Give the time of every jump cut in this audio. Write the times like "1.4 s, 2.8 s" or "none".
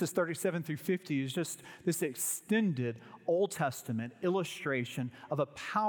none